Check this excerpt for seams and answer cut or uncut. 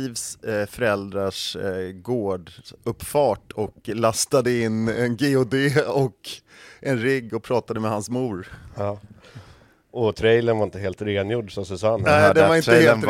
uncut